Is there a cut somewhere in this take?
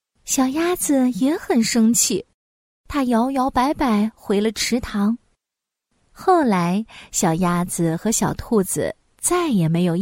no; 0 cuts

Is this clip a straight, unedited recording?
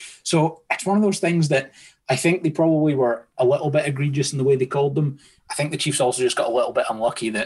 yes; 0 cuts

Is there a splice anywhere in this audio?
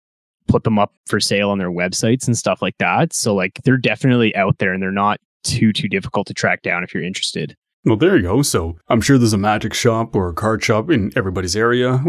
yes; 2 cuts; at 1.0 s, 8.8 s

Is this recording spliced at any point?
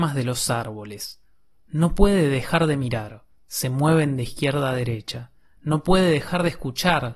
no; 0 cuts

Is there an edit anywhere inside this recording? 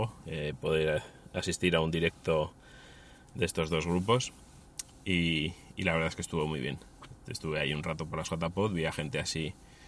no; 0 cuts

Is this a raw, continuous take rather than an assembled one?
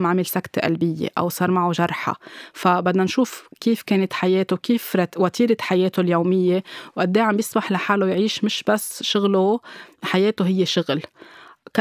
yes; 0 cuts

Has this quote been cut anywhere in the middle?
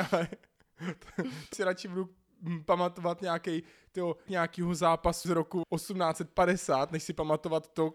yes; 4 cuts; at 1.5 s, 4.3 s, 5.2 s, 5.6 s

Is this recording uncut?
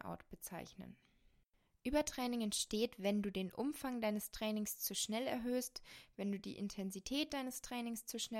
yes; 0 cuts

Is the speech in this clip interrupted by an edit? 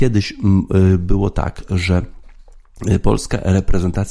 no; 0 cuts

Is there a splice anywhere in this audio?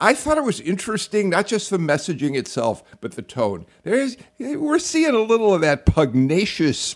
no; 0 cuts

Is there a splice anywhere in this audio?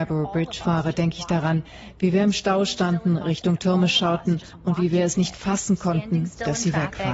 no; 0 cuts

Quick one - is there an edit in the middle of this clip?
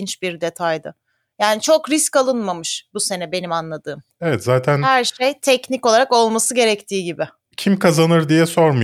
no; 0 cuts

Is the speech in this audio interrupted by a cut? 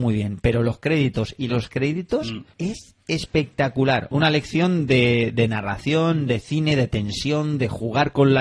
yes; 2 cuts; at 1.5 s, 2.5 s

